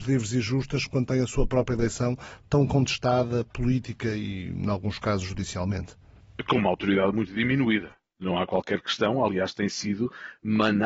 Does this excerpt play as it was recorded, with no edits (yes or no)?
yes